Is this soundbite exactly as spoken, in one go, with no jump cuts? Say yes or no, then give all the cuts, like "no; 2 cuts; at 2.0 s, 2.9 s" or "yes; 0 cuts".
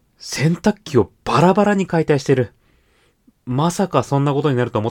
yes; 0 cuts